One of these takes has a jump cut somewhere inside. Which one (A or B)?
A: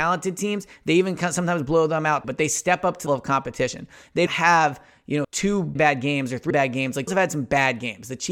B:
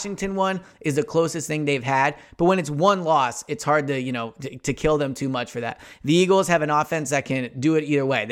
A